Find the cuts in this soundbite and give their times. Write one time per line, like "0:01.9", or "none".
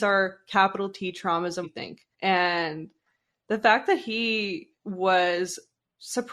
0:01.6
0:02.1
0:04.7

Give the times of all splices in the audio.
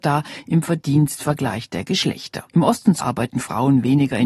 0:02.5
0:03.0

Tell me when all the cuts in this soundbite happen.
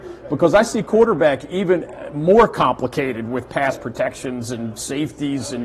none

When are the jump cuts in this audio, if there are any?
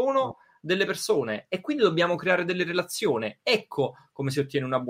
none

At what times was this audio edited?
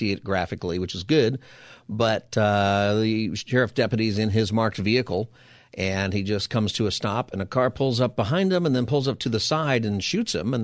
none

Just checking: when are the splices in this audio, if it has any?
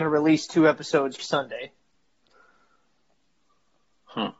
0:01.2

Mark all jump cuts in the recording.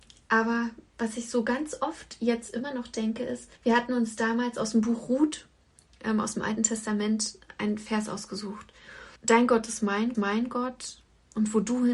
0:03.6
0:09.2
0:10.1

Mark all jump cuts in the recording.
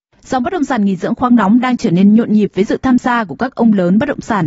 none

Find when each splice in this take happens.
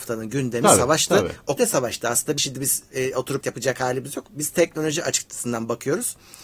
0:01.6
0:02.4
0:03.4

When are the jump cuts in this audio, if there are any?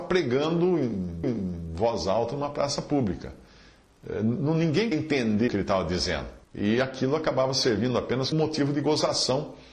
0:01.2
0:04.9
0:05.5
0:06.4
0:08.3

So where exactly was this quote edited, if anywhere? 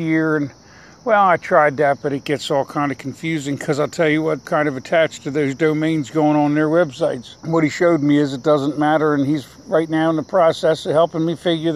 0:04.4
0:07.4

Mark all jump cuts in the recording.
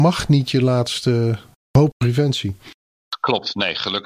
0:01.9

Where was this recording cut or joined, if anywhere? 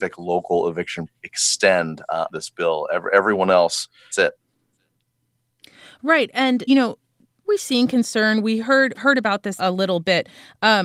0:01.1
0:02.3
0:04.1
0:06.7
0:07.4
0:08.9
0:09.6

